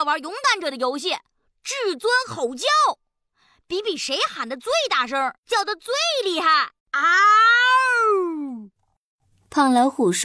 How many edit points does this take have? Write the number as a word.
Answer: two